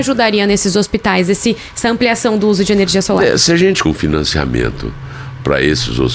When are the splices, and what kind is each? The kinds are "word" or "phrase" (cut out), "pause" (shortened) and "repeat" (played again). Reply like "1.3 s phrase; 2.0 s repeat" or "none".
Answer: 3.8 s word